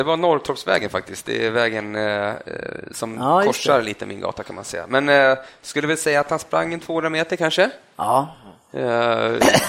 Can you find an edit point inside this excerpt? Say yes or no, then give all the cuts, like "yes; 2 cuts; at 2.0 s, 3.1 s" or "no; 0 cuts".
no; 0 cuts